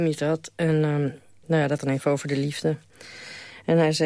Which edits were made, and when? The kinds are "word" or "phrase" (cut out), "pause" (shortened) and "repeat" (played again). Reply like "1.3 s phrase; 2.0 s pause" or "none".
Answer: 1.4 s word; 1.8 s word